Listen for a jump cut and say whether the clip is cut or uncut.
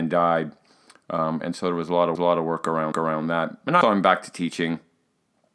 cut